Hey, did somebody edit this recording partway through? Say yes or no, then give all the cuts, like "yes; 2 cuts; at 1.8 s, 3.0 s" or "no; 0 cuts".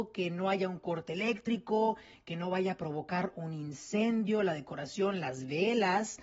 no; 0 cuts